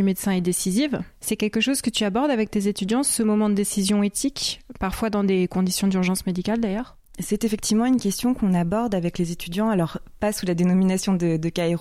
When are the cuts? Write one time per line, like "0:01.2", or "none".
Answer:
none